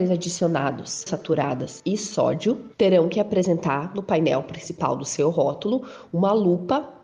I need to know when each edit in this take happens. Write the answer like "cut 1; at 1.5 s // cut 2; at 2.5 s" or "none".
cut 1; at 1.1 s // cut 2; at 2.7 s